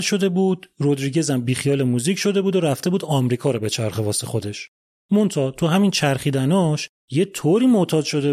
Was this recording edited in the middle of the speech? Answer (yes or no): no